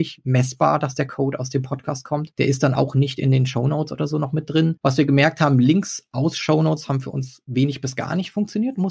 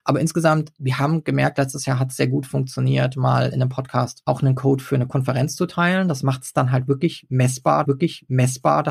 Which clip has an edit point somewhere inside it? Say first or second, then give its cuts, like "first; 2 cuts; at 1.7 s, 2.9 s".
second; 1 cut; at 7.8 s